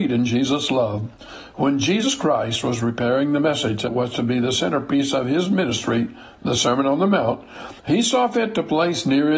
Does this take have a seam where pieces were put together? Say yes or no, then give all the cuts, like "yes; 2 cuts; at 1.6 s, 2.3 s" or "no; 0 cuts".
yes; 1 cut; at 7.8 s